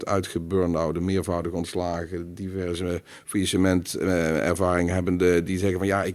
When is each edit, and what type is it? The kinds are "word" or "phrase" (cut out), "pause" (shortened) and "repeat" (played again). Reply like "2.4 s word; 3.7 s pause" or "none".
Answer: none